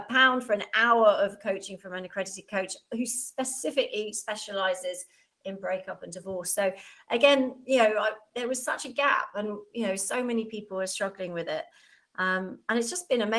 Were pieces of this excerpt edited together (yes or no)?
no